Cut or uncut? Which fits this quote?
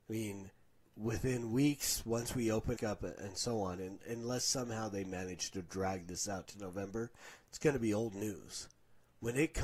cut